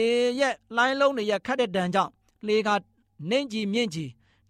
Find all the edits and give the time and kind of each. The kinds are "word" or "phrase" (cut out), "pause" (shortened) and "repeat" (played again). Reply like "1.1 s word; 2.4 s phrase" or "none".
none